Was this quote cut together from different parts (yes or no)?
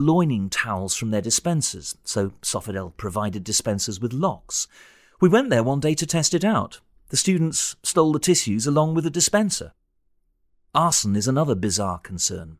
no